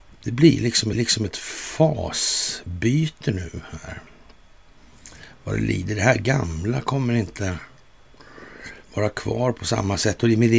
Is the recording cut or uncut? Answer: cut